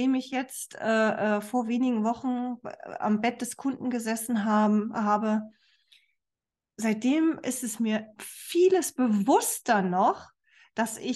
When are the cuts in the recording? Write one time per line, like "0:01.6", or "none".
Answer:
0:08.2